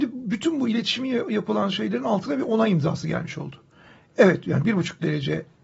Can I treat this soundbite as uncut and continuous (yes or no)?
yes